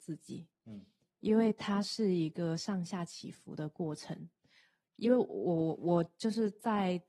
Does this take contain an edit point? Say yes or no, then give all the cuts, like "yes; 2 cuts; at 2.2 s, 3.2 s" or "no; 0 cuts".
no; 0 cuts